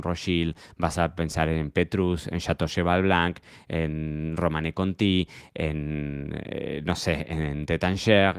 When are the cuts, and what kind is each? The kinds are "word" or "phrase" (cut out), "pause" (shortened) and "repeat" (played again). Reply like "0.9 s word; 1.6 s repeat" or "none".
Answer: none